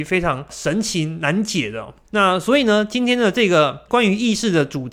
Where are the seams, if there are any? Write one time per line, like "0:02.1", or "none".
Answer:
0:02.0